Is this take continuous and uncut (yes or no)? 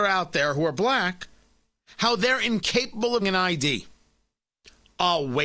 no